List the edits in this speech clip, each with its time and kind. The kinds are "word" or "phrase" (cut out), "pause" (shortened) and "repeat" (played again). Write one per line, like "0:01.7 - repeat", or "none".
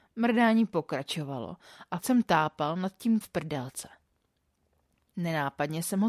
0:02.0 - word
0:03.2 - word